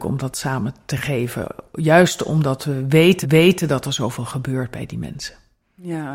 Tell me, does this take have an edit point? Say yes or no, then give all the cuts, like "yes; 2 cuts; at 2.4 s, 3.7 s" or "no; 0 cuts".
yes; 1 cut; at 3.2 s